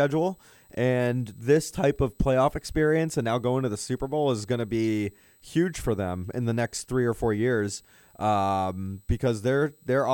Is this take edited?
no; 0 cuts

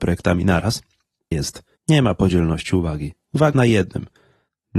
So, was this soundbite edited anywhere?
yes; 3 cuts; at 1.3 s, 1.8 s, 3.5 s

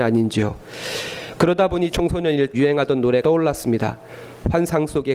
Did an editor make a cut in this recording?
yes; 3 cuts; at 1.9 s, 2.5 s, 3.2 s

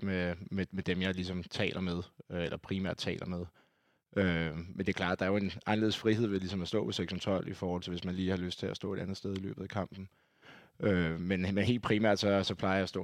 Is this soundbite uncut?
yes; 0 cuts

